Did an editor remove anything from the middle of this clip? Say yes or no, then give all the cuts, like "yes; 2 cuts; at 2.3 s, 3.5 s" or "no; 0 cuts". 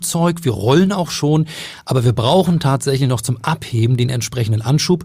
no; 0 cuts